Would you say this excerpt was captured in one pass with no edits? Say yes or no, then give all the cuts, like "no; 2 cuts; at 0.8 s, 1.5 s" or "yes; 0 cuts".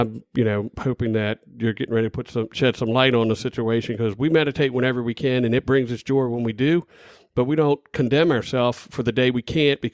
yes; 0 cuts